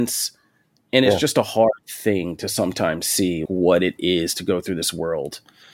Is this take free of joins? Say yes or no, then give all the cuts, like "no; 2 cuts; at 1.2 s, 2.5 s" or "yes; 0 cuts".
no; 1 cut; at 3.5 s